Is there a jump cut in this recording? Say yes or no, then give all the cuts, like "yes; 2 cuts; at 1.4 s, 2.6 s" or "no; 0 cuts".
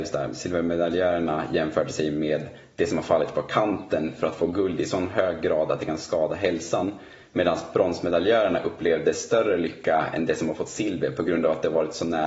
no; 0 cuts